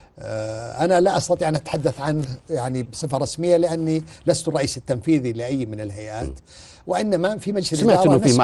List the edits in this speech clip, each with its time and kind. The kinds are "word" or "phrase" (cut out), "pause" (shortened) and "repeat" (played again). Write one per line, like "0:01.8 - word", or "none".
0:02.9 - word